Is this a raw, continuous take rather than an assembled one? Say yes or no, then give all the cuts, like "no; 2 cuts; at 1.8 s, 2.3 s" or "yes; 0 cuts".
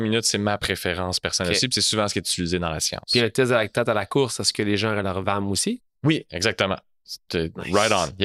yes; 0 cuts